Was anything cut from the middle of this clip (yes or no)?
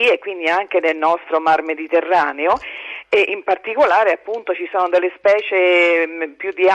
no